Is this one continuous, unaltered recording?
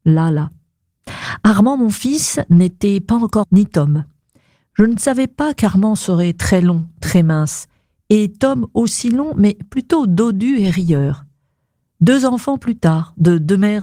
no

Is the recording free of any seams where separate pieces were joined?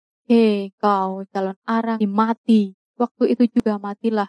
no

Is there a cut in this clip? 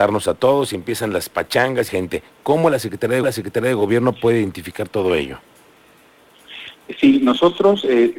yes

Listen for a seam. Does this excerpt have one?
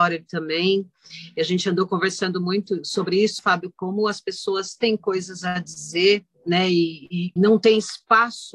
yes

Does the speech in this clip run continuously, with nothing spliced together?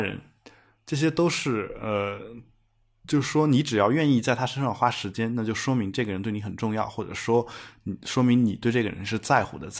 yes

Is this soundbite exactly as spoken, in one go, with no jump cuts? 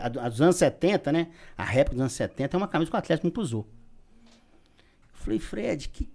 yes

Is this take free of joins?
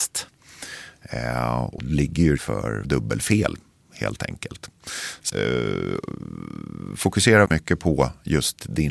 no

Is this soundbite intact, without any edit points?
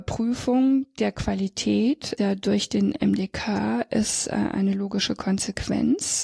no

